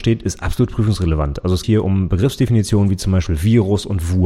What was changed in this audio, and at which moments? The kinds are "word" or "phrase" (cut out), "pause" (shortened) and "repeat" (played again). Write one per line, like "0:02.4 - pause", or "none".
0:01.6 - word